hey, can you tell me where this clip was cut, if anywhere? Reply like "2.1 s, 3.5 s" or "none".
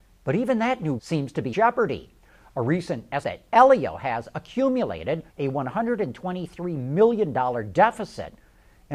1.0 s, 1.5 s, 3.2 s, 5.3 s